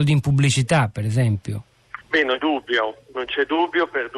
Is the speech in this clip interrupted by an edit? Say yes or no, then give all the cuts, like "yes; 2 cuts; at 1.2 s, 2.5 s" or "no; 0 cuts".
yes; 2 cuts; at 2.0 s, 2.4 s